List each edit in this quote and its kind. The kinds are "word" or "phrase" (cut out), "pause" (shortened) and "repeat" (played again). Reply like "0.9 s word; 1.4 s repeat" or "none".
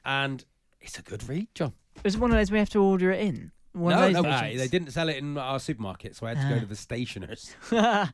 4.2 s word